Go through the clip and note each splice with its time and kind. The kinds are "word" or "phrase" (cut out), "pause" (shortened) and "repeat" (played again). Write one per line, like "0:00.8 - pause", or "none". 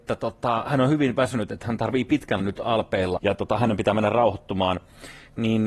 0:02.4 - word
0:03.2 - word